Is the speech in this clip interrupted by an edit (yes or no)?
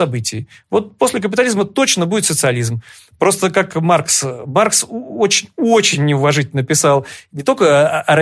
no